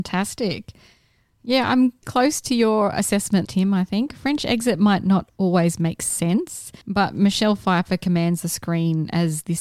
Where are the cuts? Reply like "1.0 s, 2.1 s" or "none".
2.0 s, 3.4 s, 6.8 s